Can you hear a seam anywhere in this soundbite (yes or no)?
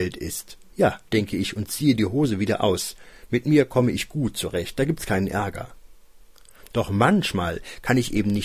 yes